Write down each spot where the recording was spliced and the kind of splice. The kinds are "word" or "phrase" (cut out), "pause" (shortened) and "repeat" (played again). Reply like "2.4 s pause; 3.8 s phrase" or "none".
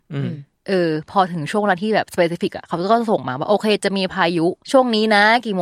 4.6 s pause